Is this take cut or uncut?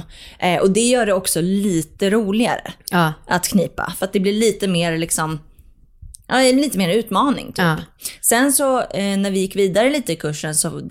uncut